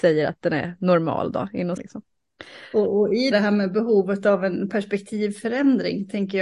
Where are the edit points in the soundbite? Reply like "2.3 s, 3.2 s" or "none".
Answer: 1.8 s, 3.3 s